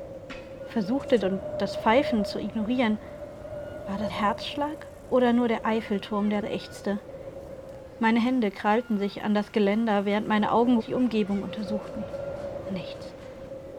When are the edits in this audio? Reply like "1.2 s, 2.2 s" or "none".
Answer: 1.2 s, 4.1 s, 6.4 s, 10.8 s